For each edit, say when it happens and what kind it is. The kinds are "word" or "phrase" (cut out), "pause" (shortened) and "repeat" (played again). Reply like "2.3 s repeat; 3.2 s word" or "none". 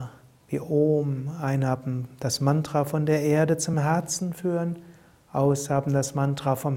none